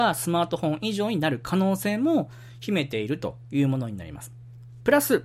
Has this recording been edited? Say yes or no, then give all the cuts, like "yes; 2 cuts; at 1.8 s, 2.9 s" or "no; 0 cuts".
no; 0 cuts